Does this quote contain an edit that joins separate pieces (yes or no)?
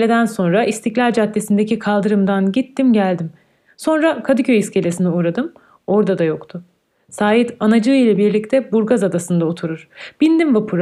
no